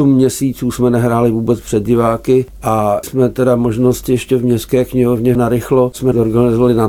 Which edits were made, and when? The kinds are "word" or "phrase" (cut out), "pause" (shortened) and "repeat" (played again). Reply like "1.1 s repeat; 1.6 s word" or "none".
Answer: 3.0 s word